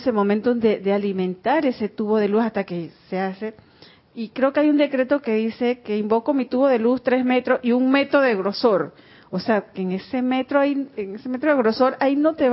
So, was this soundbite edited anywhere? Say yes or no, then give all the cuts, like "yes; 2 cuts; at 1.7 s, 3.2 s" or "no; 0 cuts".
no; 0 cuts